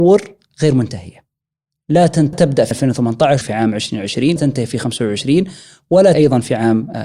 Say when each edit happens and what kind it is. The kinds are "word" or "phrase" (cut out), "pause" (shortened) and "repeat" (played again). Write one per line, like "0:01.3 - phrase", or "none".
0:02.3 - word
0:02.7 - word
0:03.4 - word
0:04.4 - word
0:06.1 - word